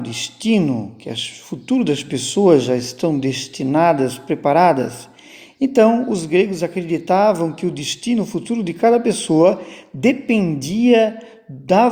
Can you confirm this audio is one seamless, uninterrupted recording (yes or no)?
yes